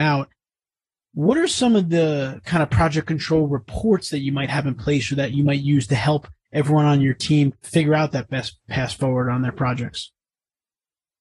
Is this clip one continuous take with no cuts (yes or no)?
yes